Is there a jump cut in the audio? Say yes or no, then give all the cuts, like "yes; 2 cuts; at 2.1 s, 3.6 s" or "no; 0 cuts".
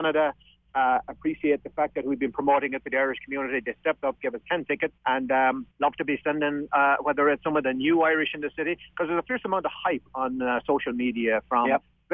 yes; 2 cuts; at 5.0 s, 5.7 s